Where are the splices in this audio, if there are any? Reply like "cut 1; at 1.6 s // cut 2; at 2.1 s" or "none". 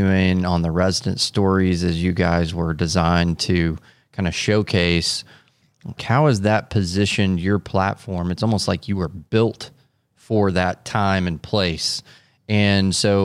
cut 1; at 6.0 s